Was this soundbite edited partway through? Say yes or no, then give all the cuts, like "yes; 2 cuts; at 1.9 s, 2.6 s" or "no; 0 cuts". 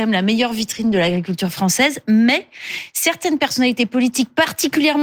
no; 0 cuts